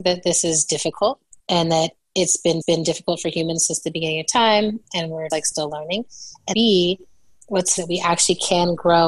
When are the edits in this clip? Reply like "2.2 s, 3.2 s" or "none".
1.4 s, 2.6 s, 5.3 s, 6.5 s, 7.8 s